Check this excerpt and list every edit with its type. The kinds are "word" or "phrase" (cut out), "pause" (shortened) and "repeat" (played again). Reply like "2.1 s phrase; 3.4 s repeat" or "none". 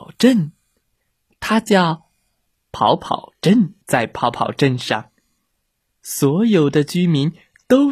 3.8 s pause